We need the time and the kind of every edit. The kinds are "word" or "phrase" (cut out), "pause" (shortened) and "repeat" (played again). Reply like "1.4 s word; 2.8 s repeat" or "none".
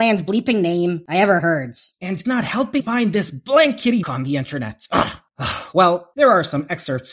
2.2 s word; 2.8 s word; 4.0 s word